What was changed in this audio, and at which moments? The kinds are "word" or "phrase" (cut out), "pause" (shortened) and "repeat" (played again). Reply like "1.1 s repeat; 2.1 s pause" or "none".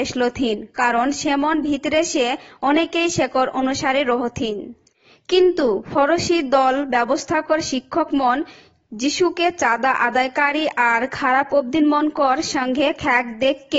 none